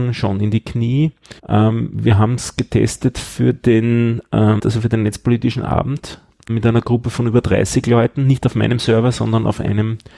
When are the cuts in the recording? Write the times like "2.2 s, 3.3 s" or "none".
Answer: 1.4 s, 4.6 s, 6.5 s